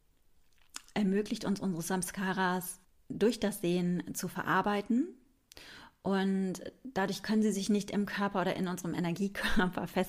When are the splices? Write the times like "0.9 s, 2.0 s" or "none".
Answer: 2.8 s